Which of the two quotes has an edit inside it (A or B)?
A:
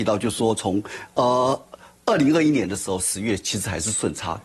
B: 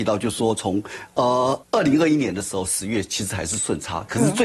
B